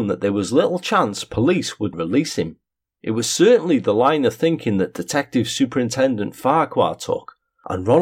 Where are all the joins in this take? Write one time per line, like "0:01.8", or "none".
0:01.9